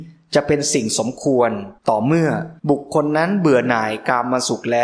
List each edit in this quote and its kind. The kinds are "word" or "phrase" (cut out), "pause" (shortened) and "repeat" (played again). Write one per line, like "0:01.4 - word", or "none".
0:01.8 - pause
0:02.6 - pause

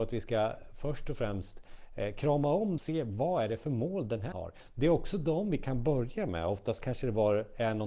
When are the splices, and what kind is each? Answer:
0:02.8 - phrase
0:04.3 - word

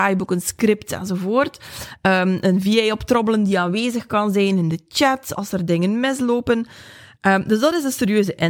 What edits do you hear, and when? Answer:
none

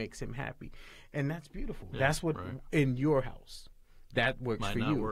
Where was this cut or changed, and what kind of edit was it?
0:02.3 - phrase

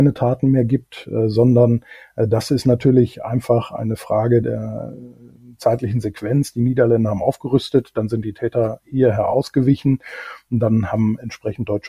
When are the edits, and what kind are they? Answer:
0:04.4 - word

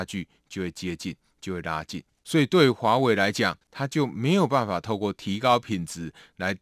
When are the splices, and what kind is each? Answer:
0:02.1 - pause
0:03.6 - pause

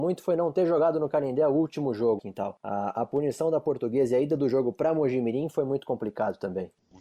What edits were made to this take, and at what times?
0:02.2 - word

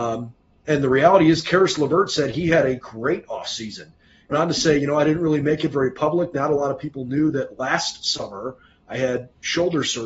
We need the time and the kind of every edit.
0:04.3 - word

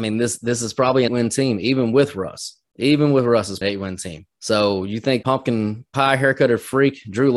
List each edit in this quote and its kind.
0:01.1 - phrase
0:03.6 - word
0:04.3 - pause
0:05.2 - phrase

